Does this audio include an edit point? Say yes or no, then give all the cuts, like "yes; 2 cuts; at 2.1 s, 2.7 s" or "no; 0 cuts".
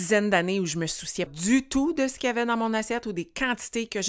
yes; 1 cut; at 1.3 s